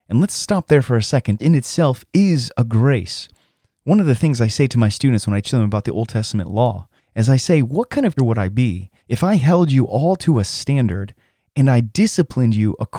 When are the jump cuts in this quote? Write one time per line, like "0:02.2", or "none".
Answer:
0:01.4
0:05.4
0:07.0
0:08.2
0:09.0